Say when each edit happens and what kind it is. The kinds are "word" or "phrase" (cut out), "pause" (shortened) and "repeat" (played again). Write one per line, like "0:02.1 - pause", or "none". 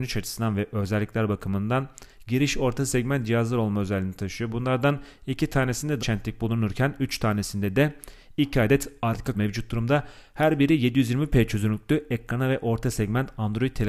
0:06.0 - word
0:09.3 - word